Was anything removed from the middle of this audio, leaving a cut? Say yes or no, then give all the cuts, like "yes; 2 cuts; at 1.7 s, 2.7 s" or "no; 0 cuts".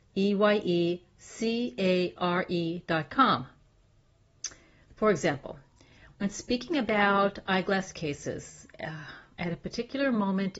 no; 0 cuts